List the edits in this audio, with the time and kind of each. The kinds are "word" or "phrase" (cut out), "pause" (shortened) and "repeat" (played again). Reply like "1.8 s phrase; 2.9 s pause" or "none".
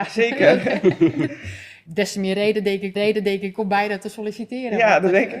1.9 s word; 2.9 s repeat